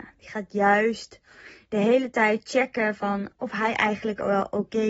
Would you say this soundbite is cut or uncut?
uncut